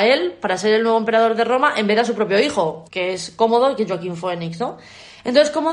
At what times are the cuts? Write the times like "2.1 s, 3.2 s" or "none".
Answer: 2.9 s

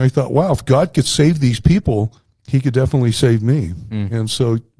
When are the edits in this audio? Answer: 2.2 s

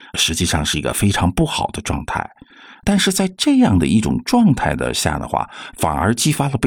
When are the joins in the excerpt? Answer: none

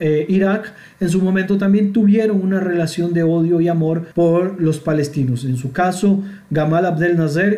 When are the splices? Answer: 4.1 s

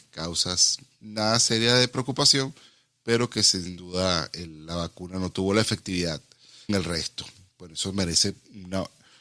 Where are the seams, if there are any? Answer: 6.7 s

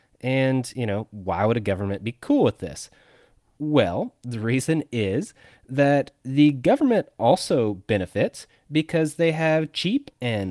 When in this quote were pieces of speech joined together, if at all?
none

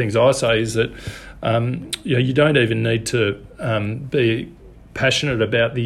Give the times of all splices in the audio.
none

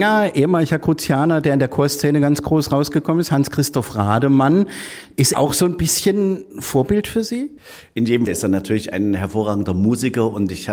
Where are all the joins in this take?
5.3 s, 8.3 s

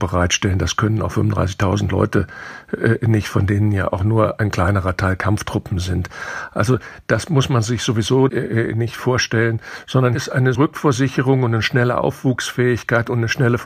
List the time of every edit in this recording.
8.3 s, 10.1 s, 10.5 s

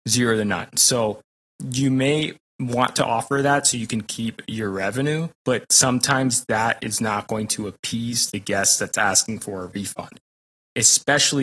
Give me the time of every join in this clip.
5.3 s

